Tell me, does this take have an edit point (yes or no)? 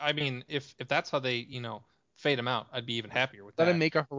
no